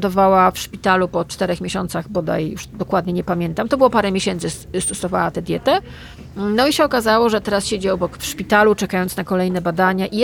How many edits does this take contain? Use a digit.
1